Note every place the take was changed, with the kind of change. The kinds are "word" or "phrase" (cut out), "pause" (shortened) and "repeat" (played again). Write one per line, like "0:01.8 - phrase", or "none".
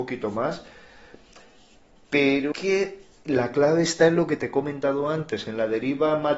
0:02.5 - word